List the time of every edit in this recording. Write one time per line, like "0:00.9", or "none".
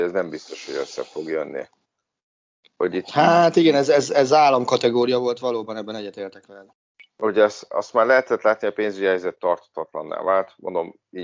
none